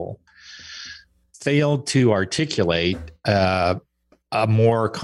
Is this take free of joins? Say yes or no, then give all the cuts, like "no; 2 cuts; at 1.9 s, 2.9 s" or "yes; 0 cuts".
yes; 0 cuts